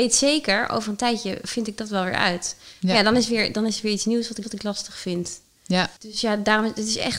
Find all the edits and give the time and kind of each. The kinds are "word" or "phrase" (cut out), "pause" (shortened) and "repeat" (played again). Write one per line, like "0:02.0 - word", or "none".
0:04.4 - repeat
0:06.0 - pause